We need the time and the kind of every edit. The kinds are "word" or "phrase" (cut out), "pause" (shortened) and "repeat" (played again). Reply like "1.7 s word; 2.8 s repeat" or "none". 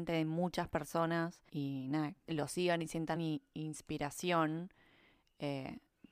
1.5 s pause; 2.3 s phrase; 3.2 s word